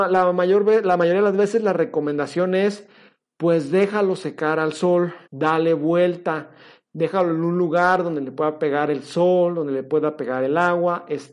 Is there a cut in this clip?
yes; 1 cut; at 5.2 s

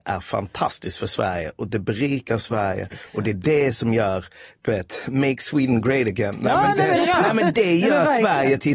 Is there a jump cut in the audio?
no; 0 cuts

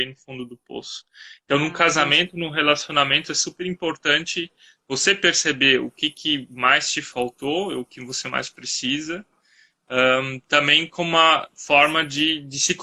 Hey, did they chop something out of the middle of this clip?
no; 0 cuts

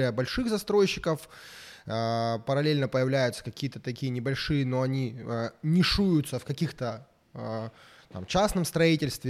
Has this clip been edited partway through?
no; 0 cuts

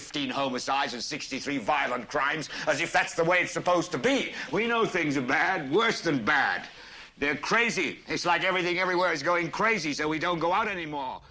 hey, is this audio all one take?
yes; 0 cuts

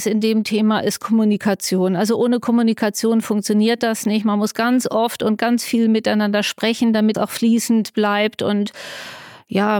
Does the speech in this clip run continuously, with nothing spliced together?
no; 1 cut; at 7.1 s

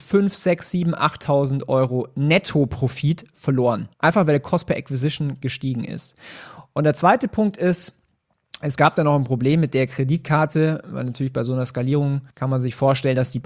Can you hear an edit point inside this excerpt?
yes; 2 cuts; at 3.9 s, 12.3 s

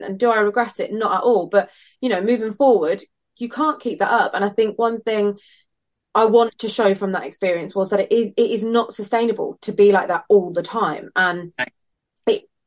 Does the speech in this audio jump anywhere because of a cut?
no; 0 cuts

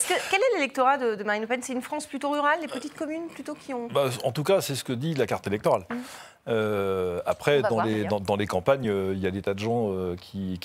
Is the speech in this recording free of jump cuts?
yes; 0 cuts

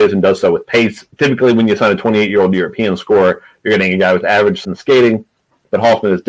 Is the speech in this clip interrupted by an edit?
yes; 2 cuts; at 1.1 s, 4.6 s

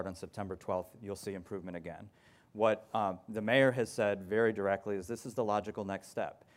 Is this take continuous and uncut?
yes; 0 cuts

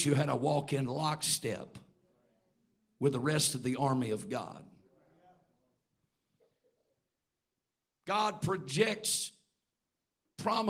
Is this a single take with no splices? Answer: yes; 0 cuts

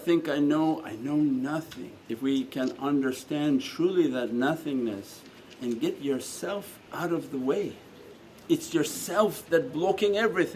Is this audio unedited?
no; 2 cuts; at 2.0 s, 8.3 s

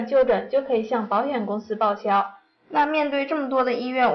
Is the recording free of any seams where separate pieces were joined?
yes; 0 cuts

